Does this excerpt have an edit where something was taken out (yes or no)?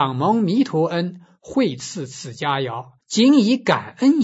yes